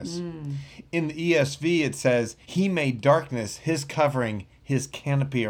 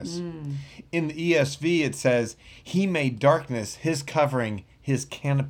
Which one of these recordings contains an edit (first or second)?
first